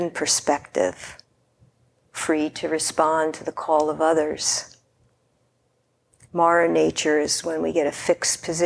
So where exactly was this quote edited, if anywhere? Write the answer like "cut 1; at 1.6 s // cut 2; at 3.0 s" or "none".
none